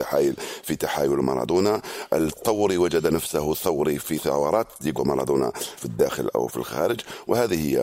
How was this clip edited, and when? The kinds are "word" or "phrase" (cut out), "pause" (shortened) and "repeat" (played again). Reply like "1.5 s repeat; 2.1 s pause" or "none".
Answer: 5.0 s word; 5.8 s word